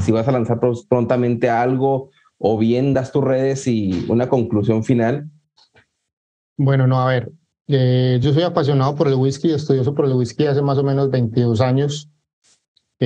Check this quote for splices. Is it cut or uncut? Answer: uncut